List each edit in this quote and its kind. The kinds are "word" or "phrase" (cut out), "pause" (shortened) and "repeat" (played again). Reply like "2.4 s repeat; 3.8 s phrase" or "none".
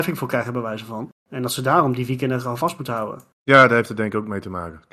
1.2 s pause; 3.3 s pause